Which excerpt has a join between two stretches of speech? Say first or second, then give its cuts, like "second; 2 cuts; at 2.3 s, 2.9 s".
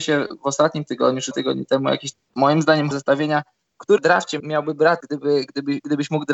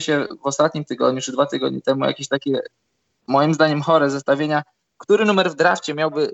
first; 6 cuts; at 1.3 s, 2.1 s, 2.9 s, 4.0 s, 4.4 s, 5.0 s